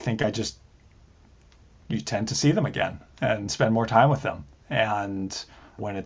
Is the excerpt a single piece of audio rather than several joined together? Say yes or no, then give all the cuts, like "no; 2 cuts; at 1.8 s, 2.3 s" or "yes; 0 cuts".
yes; 0 cuts